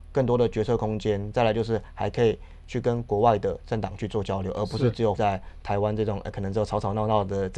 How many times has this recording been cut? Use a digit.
1